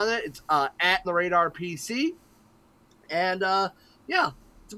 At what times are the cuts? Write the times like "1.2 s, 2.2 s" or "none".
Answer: 1.0 s